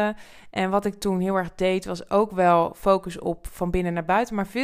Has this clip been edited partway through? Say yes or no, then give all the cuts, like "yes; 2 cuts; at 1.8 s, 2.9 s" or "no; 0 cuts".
no; 0 cuts